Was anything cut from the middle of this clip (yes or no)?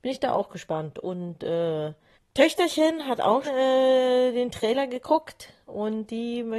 yes